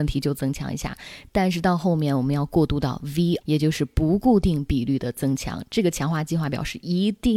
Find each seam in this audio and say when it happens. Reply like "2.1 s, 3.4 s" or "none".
3.4 s